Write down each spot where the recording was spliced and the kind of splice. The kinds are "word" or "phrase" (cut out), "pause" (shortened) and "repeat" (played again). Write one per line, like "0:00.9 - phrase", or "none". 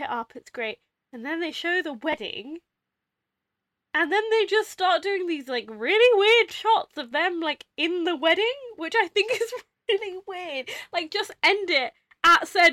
none